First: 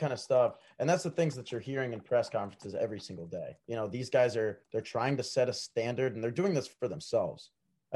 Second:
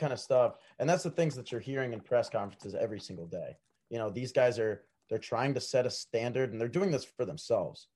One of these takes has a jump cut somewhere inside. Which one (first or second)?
first